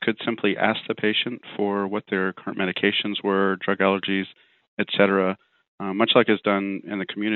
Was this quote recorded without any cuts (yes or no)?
yes